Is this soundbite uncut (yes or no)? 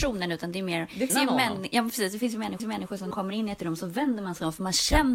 no